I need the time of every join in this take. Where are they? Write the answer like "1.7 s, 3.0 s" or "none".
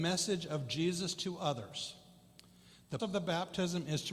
3.0 s